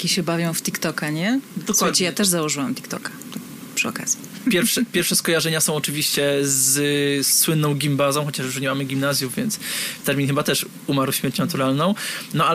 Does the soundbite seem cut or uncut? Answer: cut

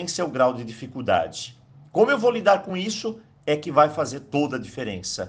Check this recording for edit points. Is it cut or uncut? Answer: uncut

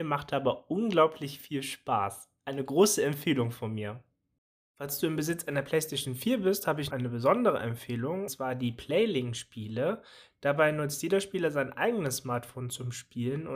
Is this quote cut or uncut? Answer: cut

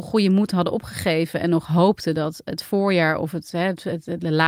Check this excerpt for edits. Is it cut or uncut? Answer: uncut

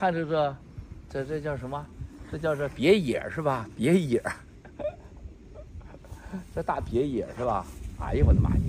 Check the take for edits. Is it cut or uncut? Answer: cut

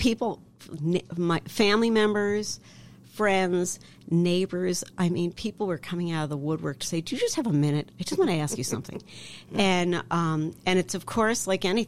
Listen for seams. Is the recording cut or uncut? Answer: uncut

